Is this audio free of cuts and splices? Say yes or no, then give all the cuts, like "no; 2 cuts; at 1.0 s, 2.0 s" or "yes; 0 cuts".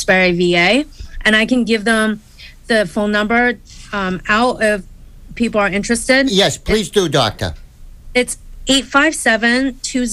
yes; 0 cuts